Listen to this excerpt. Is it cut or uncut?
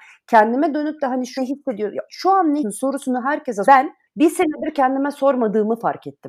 cut